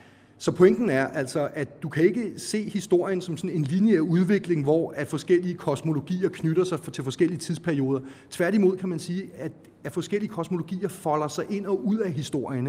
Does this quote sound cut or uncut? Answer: uncut